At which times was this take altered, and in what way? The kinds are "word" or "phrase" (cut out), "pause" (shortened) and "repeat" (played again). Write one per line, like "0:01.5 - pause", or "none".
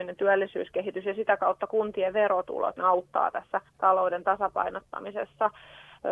0:02.8 - word
0:03.7 - pause